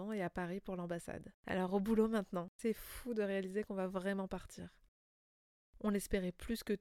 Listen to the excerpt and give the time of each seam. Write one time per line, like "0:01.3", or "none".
0:01.4
0:02.5